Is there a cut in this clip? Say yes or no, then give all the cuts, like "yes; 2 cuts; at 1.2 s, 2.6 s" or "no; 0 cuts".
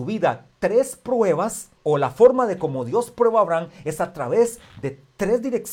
yes; 1 cut; at 1.8 s